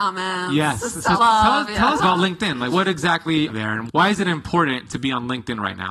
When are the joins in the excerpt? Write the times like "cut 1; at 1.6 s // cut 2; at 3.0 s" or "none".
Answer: cut 1; at 1.2 s // cut 2; at 2.0 s // cut 3; at 2.7 s // cut 4; at 3.5 s